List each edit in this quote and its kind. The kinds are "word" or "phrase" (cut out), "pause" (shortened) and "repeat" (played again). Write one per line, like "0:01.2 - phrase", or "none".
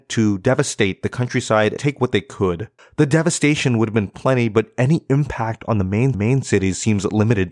0:01.8 - word
0:02.8 - pause
0:06.1 - repeat